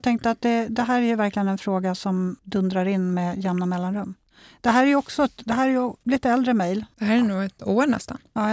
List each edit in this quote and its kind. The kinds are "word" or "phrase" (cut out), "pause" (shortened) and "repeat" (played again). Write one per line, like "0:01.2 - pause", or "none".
none